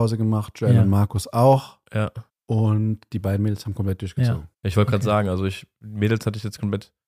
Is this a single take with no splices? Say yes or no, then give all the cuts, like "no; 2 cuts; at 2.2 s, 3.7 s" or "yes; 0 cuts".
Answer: no; 2 cuts; at 2.3 s, 4.5 s